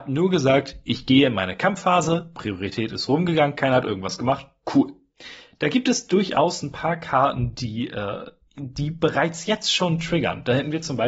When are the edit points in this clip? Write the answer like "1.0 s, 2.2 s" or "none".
none